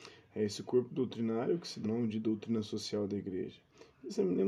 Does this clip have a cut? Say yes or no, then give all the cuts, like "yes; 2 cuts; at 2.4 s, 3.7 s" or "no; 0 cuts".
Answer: yes; 1 cut; at 1.8 s